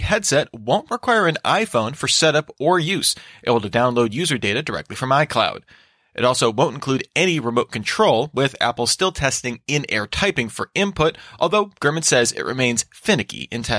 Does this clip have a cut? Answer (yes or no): no